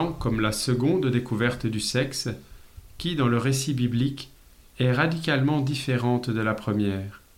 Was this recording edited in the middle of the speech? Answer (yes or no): no